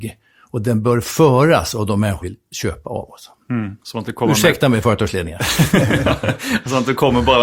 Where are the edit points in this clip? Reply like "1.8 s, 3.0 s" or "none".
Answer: 2.2 s, 3.8 s